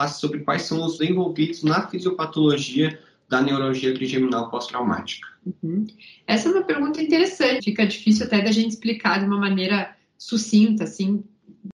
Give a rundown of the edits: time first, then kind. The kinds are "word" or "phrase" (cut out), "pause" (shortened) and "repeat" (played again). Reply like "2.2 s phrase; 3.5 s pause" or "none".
1.0 s word; 7.6 s word